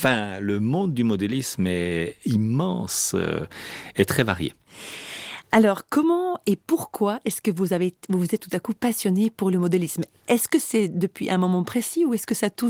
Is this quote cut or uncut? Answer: uncut